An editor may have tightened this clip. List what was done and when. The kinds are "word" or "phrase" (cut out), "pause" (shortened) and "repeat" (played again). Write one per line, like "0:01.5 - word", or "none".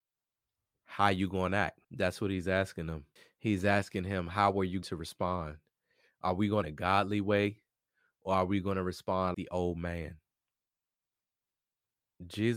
0:01.8 - pause
0:03.2 - pause
0:04.8 - word
0:06.6 - phrase
0:09.3 - word